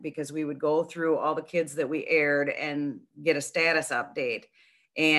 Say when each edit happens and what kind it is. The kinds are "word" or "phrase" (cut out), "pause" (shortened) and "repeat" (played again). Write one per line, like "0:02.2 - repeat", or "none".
none